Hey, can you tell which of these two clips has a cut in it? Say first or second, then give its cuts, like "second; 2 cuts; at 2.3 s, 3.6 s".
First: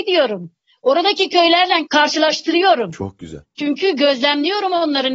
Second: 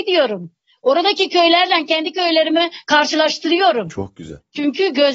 first; 1 cut; at 1.9 s